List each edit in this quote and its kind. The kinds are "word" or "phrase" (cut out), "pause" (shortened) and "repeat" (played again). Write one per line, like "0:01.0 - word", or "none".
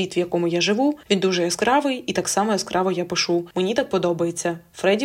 none